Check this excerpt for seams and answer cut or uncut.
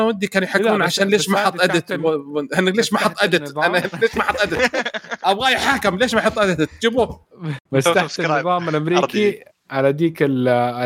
cut